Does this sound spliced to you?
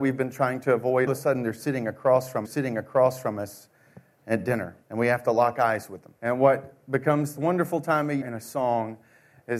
yes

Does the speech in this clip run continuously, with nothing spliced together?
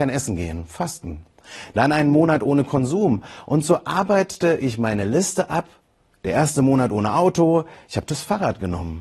yes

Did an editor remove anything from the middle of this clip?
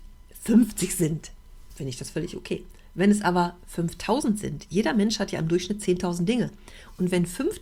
no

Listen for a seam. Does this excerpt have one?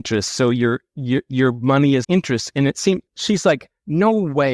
yes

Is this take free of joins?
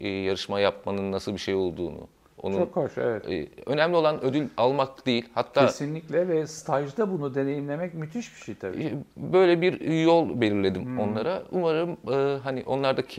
yes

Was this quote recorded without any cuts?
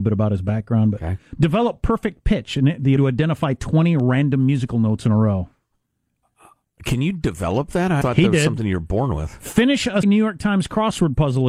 no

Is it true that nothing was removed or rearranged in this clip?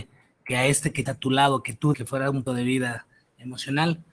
no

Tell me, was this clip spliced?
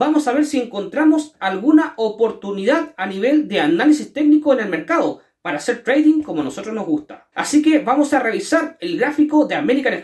yes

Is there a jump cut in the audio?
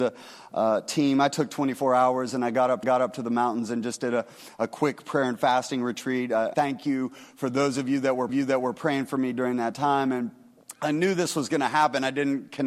yes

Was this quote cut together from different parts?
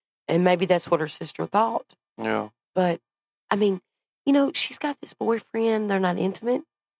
no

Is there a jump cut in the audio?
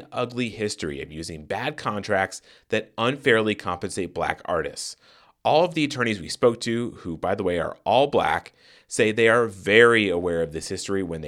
no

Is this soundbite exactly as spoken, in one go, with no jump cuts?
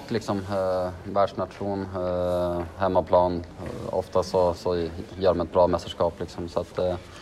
yes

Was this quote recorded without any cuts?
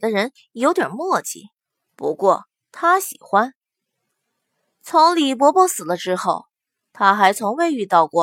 yes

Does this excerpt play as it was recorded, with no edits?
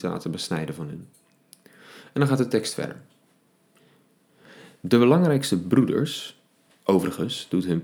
yes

